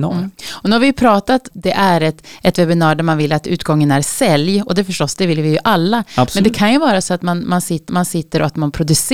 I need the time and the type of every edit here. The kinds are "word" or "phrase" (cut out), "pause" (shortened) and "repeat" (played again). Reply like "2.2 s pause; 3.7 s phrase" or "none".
1.5 s phrase; 7.9 s repeat